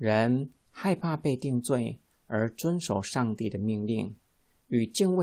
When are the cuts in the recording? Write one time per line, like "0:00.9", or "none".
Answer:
none